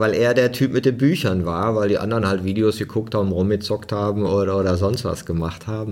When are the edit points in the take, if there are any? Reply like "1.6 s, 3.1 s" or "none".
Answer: none